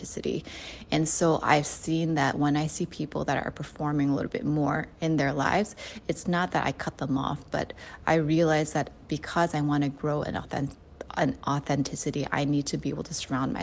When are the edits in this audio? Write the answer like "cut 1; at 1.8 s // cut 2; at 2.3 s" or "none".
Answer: none

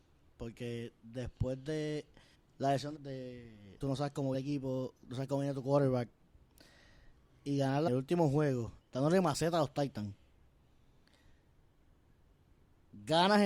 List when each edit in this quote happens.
cut 1; at 2.3 s // cut 2; at 3.0 s // cut 3; at 3.8 s // cut 4; at 4.3 s // cut 5; at 7.9 s // cut 6; at 8.8 s

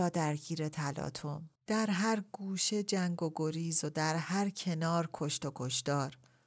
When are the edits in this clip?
cut 1; at 1.6 s

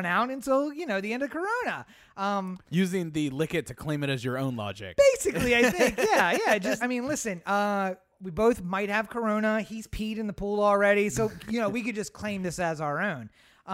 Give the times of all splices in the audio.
cut 1; at 6.8 s

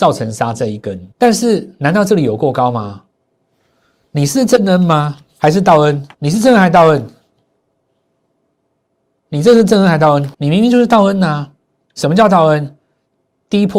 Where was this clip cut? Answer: cut 1; at 1.1 s // cut 2; at 6.1 s // cut 3; at 10.3 s

